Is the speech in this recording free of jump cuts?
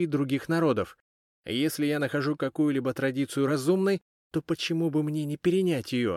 yes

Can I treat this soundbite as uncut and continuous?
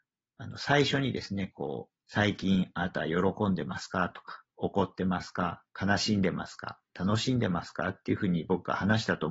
no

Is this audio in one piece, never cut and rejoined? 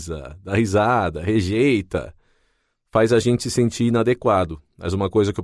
yes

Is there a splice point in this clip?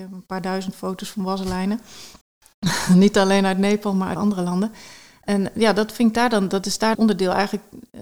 yes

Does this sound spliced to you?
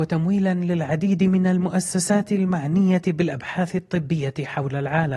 no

